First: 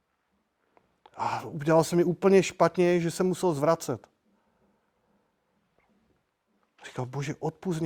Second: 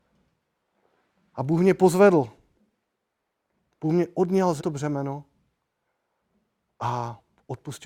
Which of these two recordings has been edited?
second; 1 cut; at 4.6 s

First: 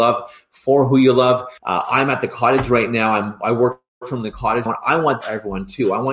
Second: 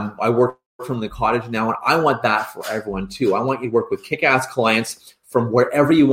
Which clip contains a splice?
first; 3 cuts; at 1.6 s, 4.7 s, 5.2 s

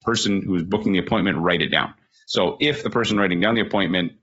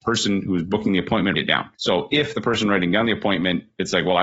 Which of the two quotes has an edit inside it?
second; 2 cuts; at 1.3 s, 1.7 s

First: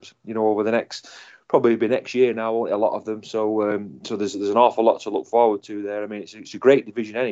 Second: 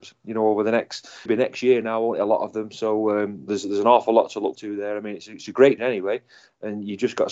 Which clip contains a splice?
second; 4 cuts; at 1.3 s, 3.5 s, 4.5 s, 5.8 s

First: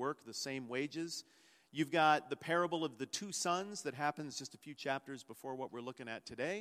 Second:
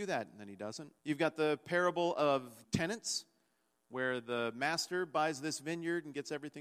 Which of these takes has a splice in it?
second; 2 cuts; at 1.0 s, 2.6 s

